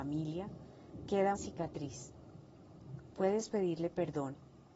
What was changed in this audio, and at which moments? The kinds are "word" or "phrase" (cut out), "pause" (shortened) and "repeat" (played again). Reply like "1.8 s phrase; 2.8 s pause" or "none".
1.4 s phrase